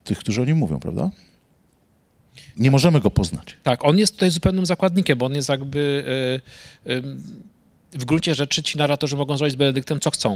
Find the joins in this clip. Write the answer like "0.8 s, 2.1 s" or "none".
none